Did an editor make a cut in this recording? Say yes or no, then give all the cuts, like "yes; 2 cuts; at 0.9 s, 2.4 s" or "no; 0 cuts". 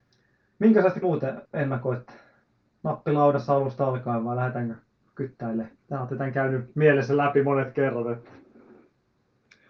yes; 3 cuts; at 1.0 s, 1.5 s, 5.8 s